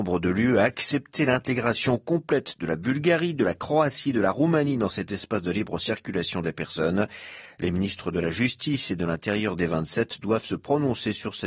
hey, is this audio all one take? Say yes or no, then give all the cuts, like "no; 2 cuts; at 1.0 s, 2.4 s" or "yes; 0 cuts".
yes; 0 cuts